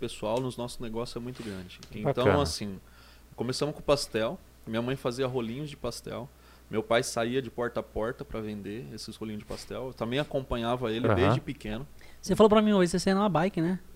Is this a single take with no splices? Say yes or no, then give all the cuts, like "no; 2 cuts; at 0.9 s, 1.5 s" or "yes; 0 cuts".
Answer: yes; 0 cuts